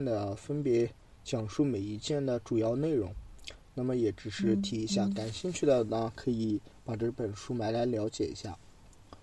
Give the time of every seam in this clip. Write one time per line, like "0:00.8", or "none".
none